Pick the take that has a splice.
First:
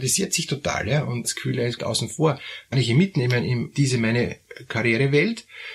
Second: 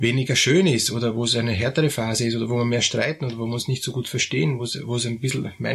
first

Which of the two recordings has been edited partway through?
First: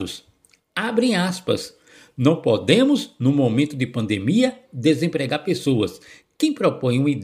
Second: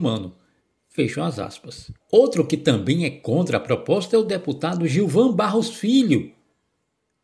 second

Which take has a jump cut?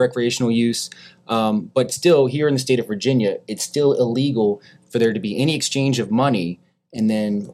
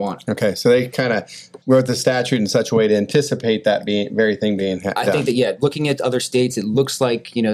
second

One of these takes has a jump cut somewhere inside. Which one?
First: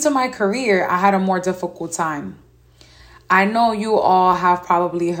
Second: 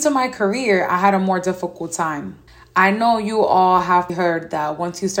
second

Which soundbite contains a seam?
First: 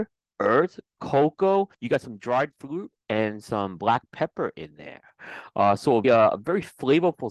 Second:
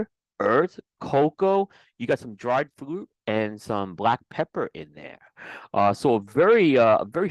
first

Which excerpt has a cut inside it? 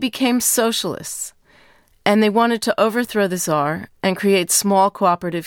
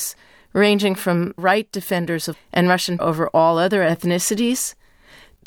second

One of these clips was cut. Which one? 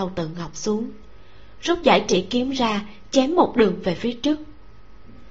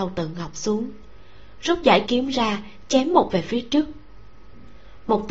second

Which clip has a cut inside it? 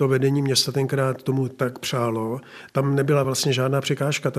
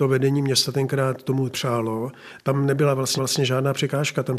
second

